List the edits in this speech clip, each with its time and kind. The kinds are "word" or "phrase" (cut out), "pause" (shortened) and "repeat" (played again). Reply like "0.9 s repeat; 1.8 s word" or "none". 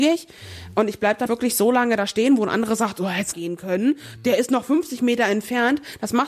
1.3 s word; 3.3 s phrase